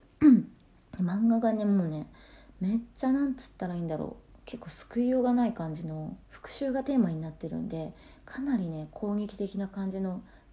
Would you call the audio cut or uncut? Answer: cut